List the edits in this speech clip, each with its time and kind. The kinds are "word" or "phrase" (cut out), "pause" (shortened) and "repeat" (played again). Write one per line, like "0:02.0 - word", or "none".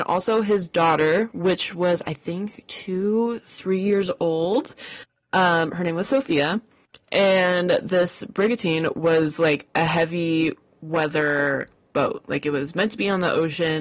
none